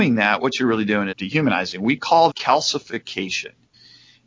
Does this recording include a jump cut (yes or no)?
yes